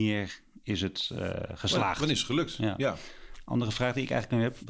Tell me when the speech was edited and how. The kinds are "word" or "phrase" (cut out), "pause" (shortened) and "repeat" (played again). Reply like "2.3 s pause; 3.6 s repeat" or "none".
none